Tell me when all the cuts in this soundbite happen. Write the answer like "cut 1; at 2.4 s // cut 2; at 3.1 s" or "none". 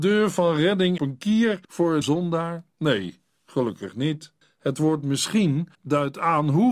cut 1; at 1.0 s // cut 2; at 1.6 s // cut 3; at 2.0 s // cut 4; at 2.7 s // cut 5; at 4.4 s // cut 6; at 5.7 s